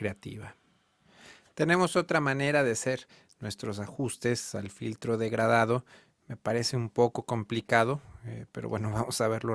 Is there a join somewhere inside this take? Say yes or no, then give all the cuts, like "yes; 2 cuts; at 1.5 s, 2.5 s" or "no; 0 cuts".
no; 0 cuts